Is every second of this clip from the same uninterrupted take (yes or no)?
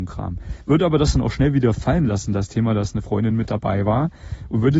yes